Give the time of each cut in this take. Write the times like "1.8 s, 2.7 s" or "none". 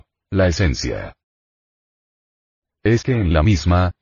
3.0 s